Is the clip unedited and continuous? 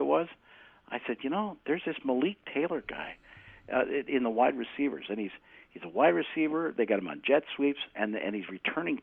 yes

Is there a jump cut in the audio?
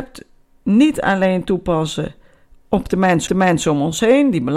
yes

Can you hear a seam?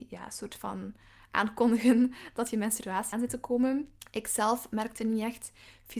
yes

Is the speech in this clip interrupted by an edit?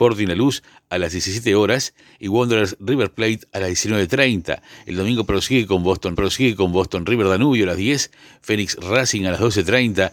yes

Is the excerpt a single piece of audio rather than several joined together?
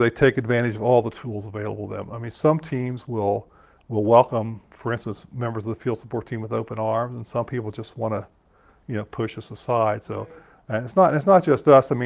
yes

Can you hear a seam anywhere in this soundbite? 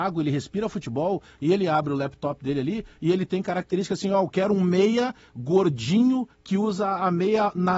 no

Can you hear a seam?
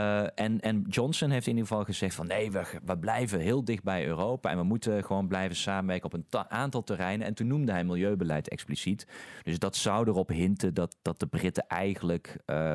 no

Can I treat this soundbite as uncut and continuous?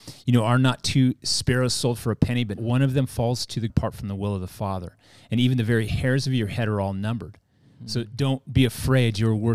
no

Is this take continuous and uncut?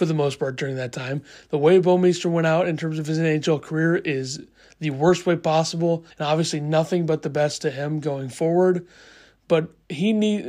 no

